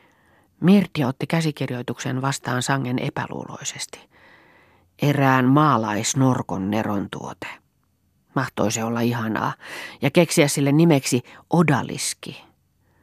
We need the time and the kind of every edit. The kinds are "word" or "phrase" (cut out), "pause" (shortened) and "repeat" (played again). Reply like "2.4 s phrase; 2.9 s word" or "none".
none